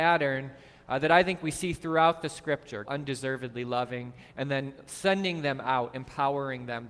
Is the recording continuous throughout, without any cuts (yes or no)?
no